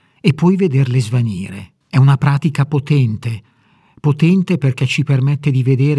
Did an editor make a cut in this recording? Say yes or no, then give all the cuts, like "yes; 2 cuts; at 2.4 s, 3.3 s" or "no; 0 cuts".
yes; 1 cut; at 1.8 s